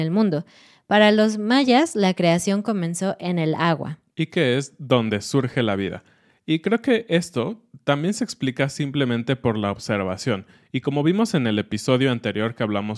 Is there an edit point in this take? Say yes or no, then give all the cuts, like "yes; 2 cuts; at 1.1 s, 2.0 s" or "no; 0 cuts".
no; 0 cuts